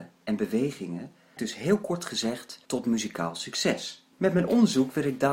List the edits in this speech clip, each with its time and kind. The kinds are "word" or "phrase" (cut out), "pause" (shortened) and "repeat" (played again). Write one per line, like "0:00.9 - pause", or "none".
0:01.4 - word
0:02.7 - pause
0:04.1 - pause